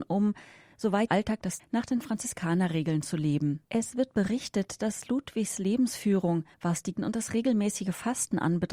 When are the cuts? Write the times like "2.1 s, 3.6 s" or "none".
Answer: 1.1 s, 1.6 s, 3.7 s, 6.5 s, 7.0 s